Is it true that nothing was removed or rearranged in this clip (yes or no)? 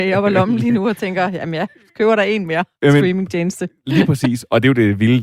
yes